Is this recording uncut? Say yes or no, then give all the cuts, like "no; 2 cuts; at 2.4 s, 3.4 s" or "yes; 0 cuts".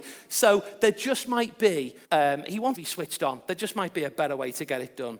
no; 2 cuts; at 2.0 s, 2.7 s